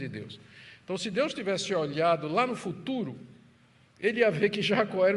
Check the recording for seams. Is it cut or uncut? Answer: uncut